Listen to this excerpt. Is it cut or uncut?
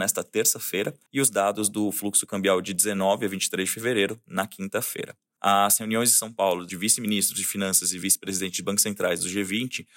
uncut